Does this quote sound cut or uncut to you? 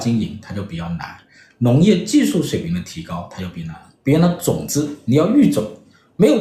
uncut